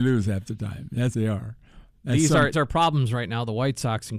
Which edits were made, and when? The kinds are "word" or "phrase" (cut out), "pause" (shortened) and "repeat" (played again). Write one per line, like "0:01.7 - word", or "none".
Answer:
0:01.1 - word
0:02.5 - word